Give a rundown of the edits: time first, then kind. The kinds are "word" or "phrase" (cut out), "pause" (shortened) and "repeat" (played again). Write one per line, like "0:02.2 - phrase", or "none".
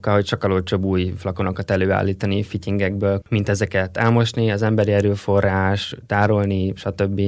0:03.2 - word